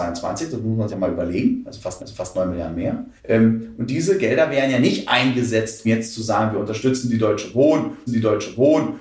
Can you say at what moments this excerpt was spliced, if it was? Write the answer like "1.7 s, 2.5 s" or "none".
0.9 s, 2.0 s, 3.2 s, 5.8 s, 8.1 s